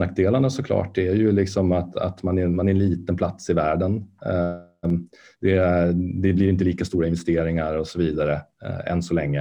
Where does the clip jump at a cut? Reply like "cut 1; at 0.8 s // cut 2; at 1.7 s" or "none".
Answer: none

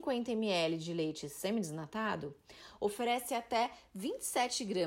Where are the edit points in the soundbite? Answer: none

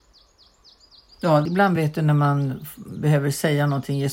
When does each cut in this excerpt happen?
none

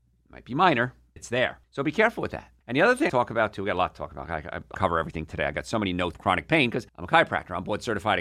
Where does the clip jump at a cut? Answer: cut 1; at 1.2 s // cut 2; at 1.6 s // cut 3; at 2.6 s // cut 4; at 3.1 s // cut 5; at 4.7 s // cut 6; at 6.1 s // cut 7; at 6.9 s

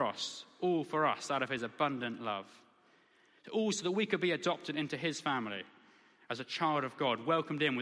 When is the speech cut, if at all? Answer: none

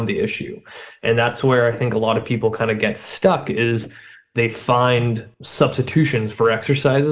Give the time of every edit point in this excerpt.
cut 1; at 5.3 s

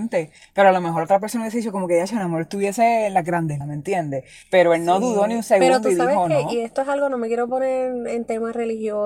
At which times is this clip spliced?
cut 1; at 3.6 s

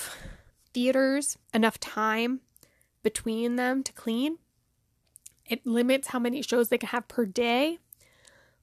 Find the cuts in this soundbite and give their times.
cut 1; at 1.4 s

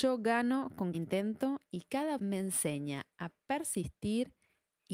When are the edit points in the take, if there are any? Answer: cut 1; at 0.9 s // cut 2; at 2.2 s

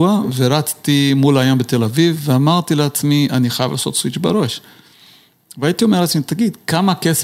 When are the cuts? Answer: none

